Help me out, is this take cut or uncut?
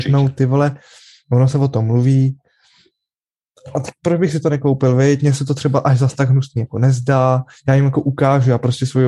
uncut